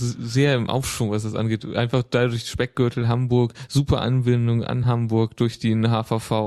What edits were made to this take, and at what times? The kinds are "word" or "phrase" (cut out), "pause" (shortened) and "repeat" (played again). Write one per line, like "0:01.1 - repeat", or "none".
none